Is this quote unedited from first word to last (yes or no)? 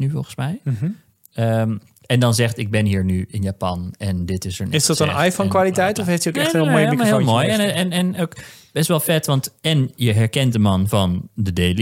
yes